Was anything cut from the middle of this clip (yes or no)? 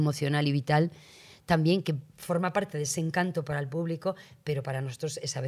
no